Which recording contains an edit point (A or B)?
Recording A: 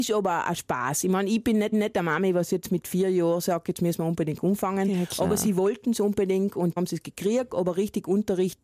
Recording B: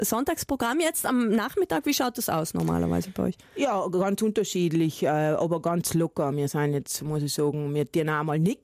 A